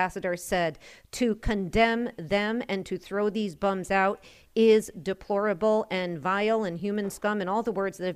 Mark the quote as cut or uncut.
uncut